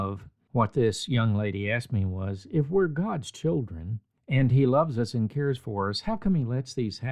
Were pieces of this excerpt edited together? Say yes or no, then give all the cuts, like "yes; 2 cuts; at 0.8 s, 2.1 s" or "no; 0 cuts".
no; 0 cuts